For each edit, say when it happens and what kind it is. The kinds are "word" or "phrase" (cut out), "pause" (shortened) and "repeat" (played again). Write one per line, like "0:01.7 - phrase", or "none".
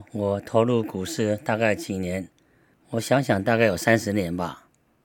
none